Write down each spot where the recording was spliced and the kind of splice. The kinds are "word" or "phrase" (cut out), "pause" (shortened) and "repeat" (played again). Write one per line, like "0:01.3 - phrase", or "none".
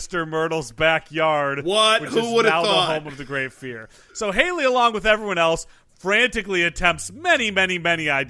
none